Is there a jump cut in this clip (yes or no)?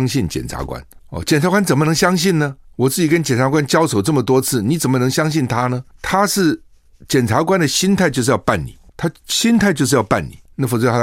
no